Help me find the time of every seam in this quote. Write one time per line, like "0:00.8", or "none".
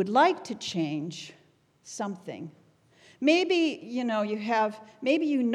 none